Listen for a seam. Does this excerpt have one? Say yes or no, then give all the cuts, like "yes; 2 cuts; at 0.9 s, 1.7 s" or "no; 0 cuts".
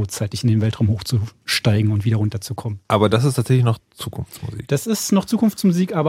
no; 0 cuts